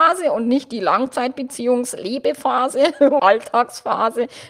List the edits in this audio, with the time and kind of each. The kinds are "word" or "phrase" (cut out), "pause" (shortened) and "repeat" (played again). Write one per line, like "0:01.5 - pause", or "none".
0:03.2 - word

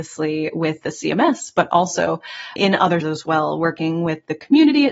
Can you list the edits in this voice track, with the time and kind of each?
0:02.6 - word
0:03.0 - word

